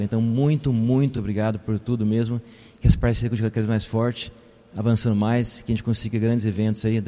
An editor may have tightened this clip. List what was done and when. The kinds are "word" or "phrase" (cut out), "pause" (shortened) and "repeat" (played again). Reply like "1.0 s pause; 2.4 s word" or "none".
1.2 s word